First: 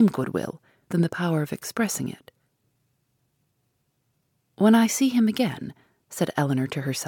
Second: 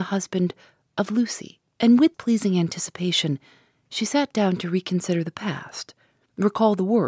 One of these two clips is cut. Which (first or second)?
second